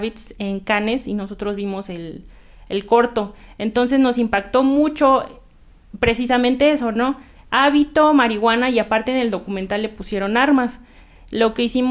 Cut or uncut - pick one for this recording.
uncut